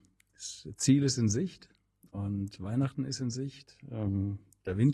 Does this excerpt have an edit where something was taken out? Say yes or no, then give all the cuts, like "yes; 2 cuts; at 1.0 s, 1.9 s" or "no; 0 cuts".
no; 0 cuts